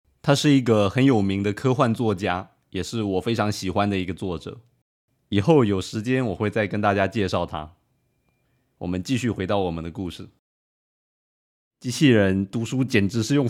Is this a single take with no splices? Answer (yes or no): yes